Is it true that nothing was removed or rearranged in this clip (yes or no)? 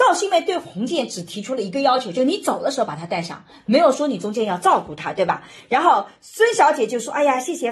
yes